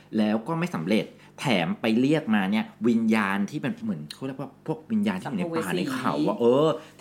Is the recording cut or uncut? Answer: uncut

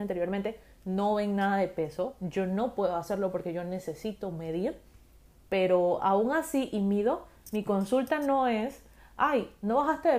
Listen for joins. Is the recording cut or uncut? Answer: uncut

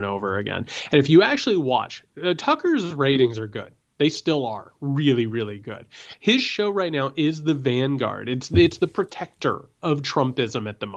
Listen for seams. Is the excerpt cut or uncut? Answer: uncut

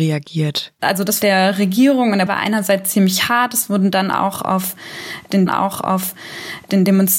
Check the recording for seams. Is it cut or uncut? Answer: cut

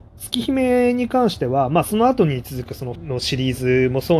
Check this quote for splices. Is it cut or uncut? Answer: cut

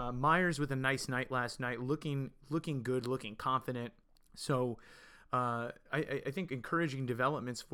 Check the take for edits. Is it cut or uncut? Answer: cut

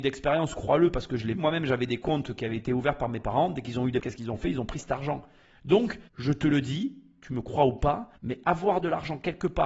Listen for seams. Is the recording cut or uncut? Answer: cut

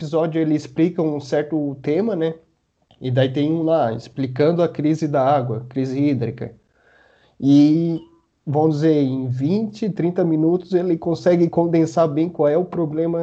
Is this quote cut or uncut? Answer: uncut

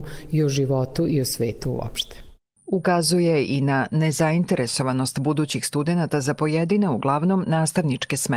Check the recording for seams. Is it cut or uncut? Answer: uncut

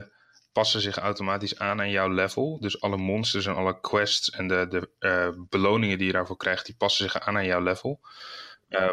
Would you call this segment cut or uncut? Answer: uncut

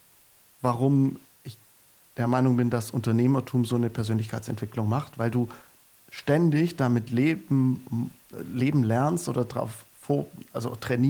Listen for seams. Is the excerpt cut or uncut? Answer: uncut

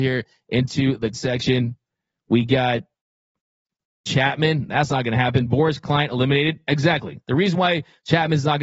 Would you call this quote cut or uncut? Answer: cut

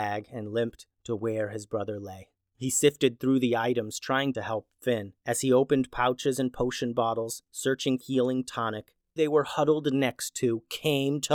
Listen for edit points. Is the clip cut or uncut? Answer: cut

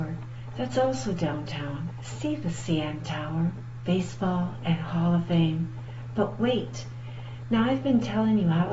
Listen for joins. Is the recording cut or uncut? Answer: uncut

